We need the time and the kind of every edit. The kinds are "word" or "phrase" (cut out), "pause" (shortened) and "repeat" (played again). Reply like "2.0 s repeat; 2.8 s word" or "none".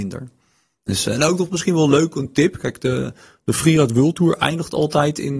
none